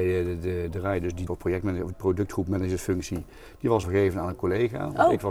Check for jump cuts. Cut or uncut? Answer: cut